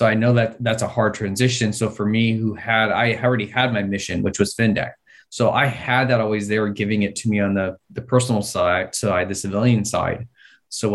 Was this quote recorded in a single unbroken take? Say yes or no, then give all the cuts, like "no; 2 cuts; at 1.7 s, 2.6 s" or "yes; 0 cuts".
yes; 0 cuts